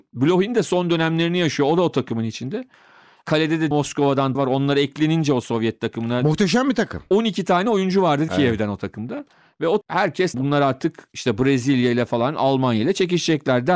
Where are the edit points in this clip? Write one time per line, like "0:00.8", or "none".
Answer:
0:03.7
0:04.3
0:08.3
0:09.8
0:10.3